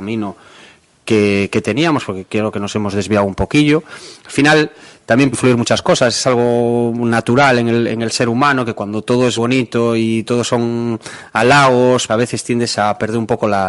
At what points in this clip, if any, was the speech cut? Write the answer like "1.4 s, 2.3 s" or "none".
5.3 s, 9.4 s, 12.1 s